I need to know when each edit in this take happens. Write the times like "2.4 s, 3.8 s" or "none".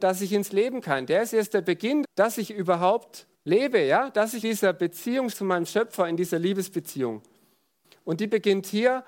2.0 s, 3.3 s, 4.4 s, 5.3 s